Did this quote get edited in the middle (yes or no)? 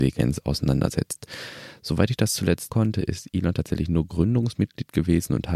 yes